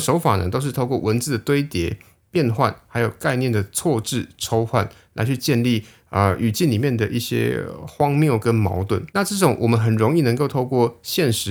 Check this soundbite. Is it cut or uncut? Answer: cut